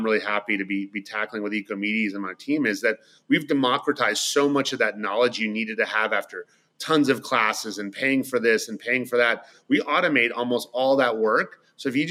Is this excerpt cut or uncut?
uncut